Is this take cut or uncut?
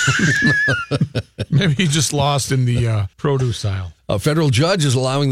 cut